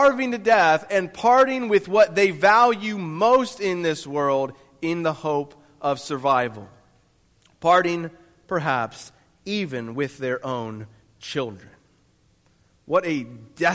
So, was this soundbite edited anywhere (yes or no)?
no